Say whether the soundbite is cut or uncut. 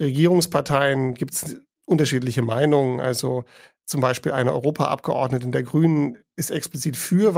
uncut